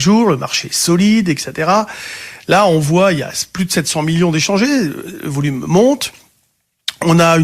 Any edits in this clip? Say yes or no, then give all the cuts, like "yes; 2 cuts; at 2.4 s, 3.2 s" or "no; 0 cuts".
no; 0 cuts